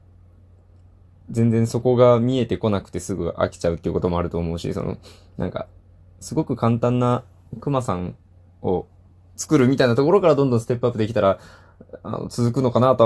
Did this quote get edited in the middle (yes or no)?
no